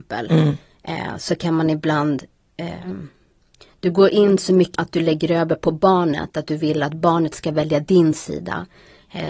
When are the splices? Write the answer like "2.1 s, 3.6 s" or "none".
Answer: 4.7 s